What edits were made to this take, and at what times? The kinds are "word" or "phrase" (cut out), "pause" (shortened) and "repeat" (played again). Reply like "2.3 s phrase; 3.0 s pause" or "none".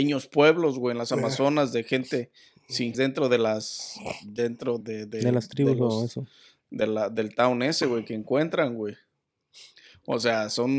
2.9 s phrase; 4.8 s word